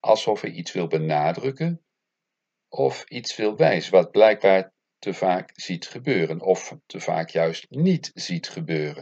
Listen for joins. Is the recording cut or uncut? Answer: uncut